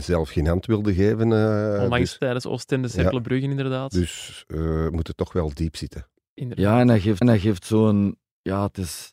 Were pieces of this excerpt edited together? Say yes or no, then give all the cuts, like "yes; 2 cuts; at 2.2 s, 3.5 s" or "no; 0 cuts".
yes; 1 cut; at 7.2 s